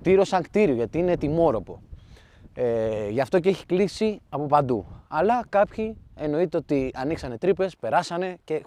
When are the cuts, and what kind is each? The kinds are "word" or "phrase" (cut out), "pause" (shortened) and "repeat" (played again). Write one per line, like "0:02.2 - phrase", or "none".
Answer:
none